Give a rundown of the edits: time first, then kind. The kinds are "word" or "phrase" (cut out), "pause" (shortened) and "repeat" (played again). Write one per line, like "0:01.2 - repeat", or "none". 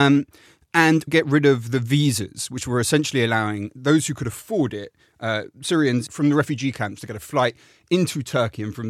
0:01.1 - word